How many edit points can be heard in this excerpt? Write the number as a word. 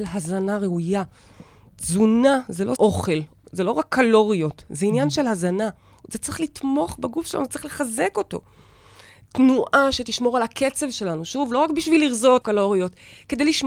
two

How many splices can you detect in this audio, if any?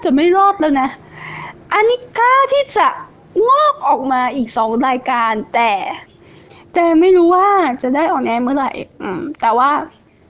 one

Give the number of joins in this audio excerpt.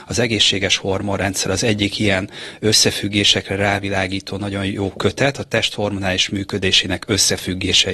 zero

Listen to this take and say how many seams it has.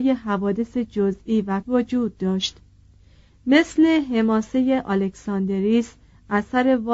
one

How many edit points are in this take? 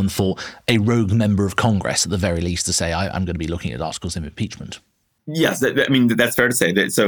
zero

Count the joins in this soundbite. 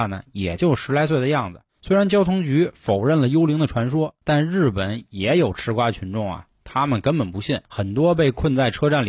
three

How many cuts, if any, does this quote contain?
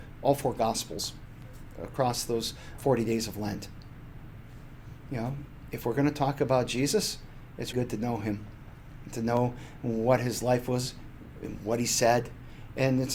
three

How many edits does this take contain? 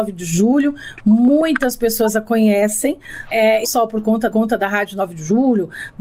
three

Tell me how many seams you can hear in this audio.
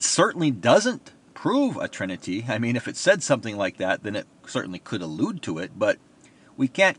zero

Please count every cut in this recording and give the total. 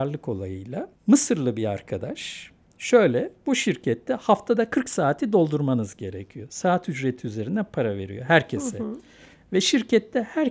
two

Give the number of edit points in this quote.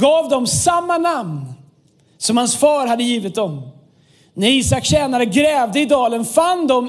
zero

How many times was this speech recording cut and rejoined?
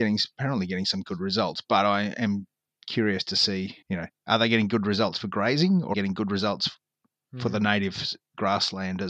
two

